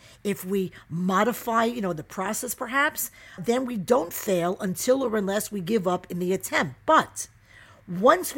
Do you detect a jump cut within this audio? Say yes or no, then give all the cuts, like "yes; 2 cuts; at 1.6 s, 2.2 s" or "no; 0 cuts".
yes; 1 cut; at 3.4 s